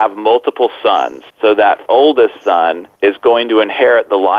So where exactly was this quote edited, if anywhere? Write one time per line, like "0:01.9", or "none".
0:01.3
0:01.9
0:03.0